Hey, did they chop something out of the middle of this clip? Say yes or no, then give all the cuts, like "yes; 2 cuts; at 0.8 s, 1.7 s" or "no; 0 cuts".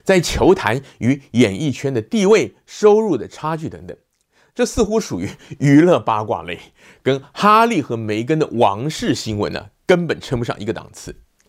no; 0 cuts